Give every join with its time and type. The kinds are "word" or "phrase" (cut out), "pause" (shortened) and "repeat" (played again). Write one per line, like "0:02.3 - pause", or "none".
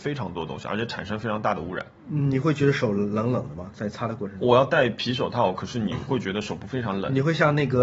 0:02.0 - pause